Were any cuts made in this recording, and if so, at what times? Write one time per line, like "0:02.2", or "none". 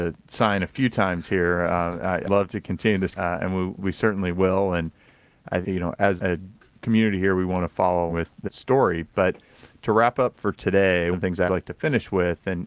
0:02.2
0:03.1
0:03.8
0:05.6
0:06.2
0:08.1
0:08.4
0:11.1
0:11.5